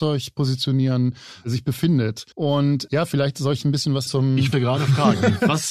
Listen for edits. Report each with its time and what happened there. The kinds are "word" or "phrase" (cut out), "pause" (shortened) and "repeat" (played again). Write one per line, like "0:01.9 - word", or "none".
0:02.3 - pause
0:04.1 - word
0:04.5 - word

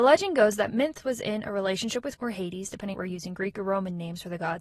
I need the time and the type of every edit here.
0:02.2 - word
0:02.9 - phrase

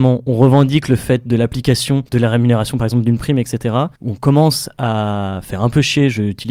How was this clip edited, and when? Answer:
0:02.1 - pause
0:03.9 - pause

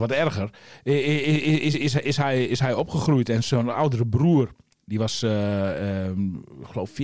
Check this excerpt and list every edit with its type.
none

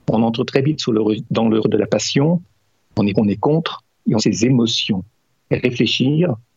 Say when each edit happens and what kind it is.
0:01.6 - word
0:03.1 - word
0:04.2 - word

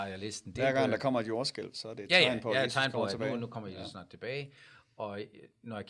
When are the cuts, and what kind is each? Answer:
none

